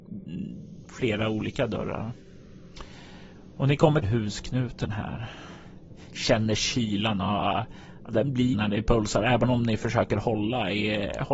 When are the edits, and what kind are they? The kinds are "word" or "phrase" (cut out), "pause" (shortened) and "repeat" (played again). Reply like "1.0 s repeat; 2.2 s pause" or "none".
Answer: 4.0 s phrase; 8.5 s phrase